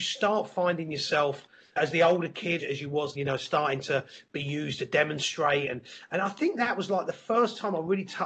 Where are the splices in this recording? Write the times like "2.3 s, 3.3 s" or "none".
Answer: 1.8 s, 2.6 s, 3.1 s